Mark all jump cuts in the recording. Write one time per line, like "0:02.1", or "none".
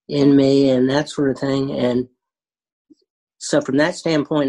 none